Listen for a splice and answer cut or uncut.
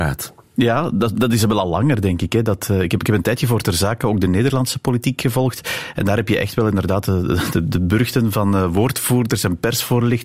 uncut